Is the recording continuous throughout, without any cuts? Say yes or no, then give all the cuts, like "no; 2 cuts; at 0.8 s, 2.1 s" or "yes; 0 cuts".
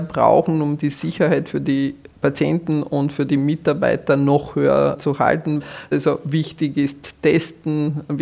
yes; 0 cuts